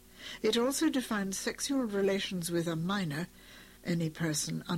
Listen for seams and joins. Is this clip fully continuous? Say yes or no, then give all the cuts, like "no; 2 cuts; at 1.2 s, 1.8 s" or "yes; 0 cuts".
no; 1 cut; at 3.8 s